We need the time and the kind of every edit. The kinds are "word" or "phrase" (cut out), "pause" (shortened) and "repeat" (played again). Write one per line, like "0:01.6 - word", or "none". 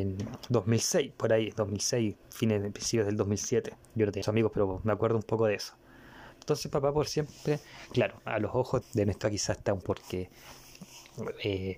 0:02.2 - pause
0:03.8 - pause
0:04.2 - word
0:08.8 - word
0:09.2 - word
0:09.8 - phrase